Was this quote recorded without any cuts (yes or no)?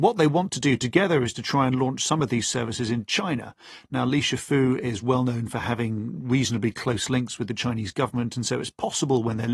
yes